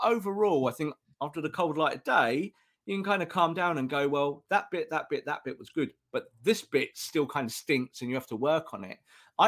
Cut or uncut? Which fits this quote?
uncut